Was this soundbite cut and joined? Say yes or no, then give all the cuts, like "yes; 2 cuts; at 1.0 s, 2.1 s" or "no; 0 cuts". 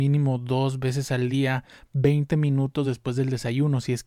no; 0 cuts